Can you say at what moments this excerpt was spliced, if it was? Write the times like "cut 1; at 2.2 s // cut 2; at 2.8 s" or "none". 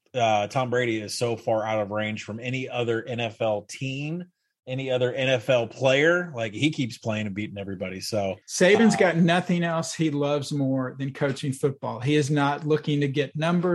cut 1; at 8.4 s